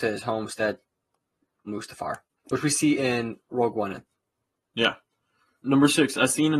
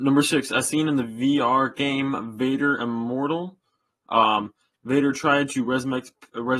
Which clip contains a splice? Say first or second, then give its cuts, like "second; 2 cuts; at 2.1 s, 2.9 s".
first; 4 cuts; at 1.7 s, 2.4 s, 3.5 s, 5.6 s